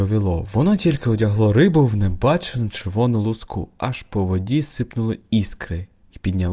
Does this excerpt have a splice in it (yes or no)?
no